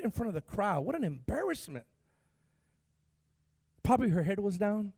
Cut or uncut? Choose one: uncut